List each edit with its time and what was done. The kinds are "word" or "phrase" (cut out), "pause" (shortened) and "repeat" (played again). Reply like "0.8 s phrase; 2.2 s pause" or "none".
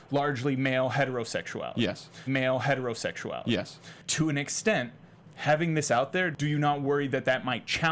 2.3 s repeat

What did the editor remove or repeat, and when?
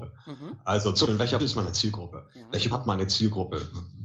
1.1 s word; 1.4 s word; 2.7 s word

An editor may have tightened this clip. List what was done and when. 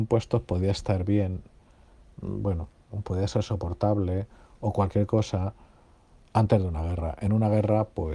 none

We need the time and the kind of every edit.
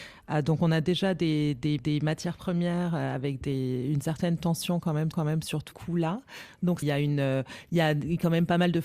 1.8 s repeat; 5.1 s repeat; 5.7 s word; 6.8 s phrase

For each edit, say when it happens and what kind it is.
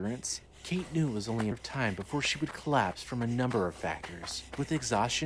1.5 s word

